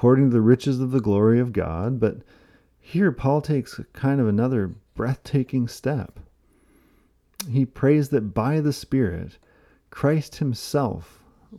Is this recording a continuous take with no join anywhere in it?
yes; 0 cuts

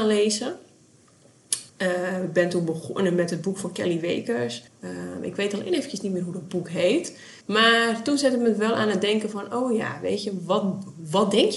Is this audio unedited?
no; 3 cuts; at 1.7 s, 4.7 s, 7.4 s

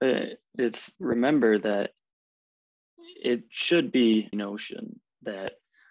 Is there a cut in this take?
yes; 2 cuts; at 1.0 s, 4.3 s

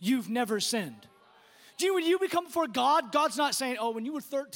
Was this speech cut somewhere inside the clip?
no; 0 cuts

